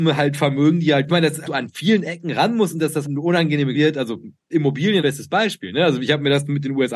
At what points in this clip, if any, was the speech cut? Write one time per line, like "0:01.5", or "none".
0:01.1
0:01.5
0:03.0
0:03.7
0:05.0